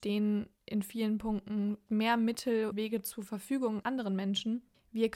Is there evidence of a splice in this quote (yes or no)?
yes